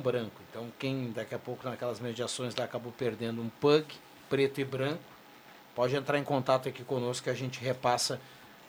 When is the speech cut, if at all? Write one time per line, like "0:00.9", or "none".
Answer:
none